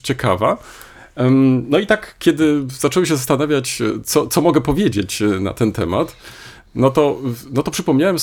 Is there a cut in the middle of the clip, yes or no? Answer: no